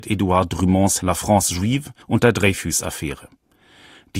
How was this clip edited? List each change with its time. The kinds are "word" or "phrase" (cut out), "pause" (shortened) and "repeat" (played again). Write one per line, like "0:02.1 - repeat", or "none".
0:01.0 - word
0:02.0 - pause